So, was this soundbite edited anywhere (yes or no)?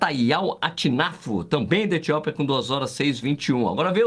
no